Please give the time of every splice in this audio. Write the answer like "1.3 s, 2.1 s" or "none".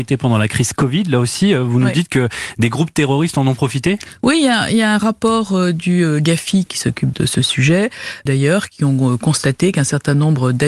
6.7 s, 7.1 s, 8.3 s